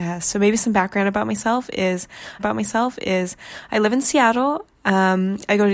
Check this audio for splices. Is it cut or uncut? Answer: cut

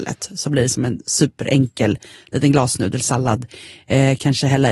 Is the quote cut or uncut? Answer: uncut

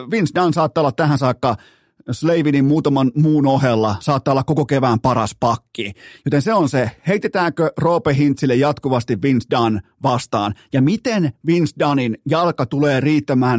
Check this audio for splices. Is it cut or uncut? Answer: uncut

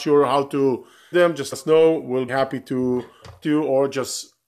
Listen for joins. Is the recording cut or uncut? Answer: cut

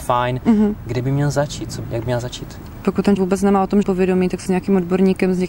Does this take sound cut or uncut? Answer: cut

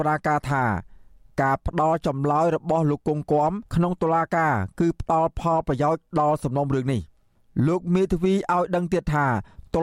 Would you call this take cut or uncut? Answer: cut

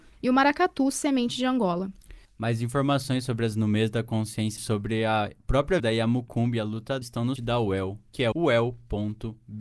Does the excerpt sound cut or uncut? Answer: cut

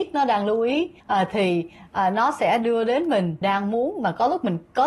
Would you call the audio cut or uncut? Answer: cut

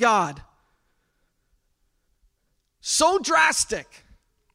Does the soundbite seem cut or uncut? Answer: uncut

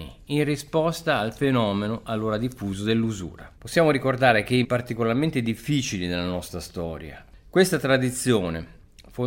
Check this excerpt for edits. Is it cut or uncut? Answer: cut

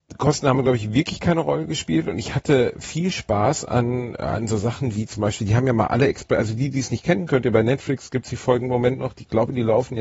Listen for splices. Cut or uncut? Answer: uncut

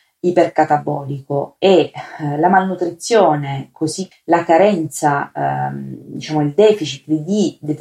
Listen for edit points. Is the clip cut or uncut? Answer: cut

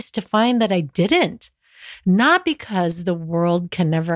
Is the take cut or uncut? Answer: uncut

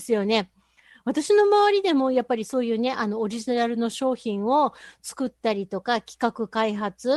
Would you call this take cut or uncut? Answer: uncut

